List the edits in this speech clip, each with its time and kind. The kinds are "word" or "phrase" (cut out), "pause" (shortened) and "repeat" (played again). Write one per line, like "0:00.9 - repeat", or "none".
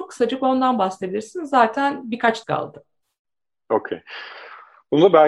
0:02.4 - word